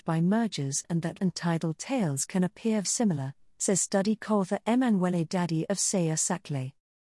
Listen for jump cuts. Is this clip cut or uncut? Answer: cut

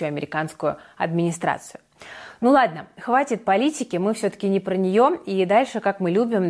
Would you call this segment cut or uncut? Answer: uncut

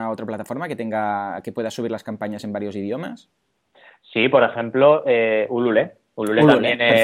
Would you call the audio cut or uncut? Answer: uncut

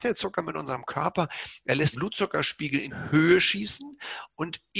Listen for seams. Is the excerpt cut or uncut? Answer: cut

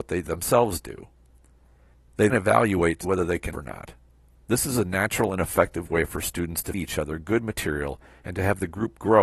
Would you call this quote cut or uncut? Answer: cut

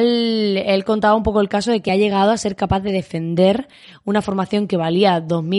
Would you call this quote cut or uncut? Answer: uncut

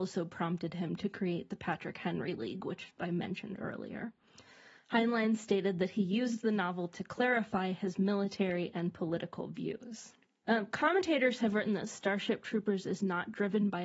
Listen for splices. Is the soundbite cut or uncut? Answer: uncut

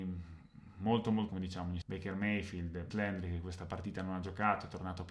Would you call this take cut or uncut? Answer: cut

